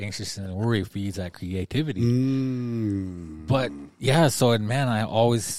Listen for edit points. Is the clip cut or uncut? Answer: uncut